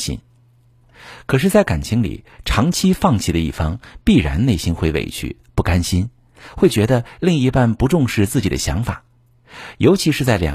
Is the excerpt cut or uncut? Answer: uncut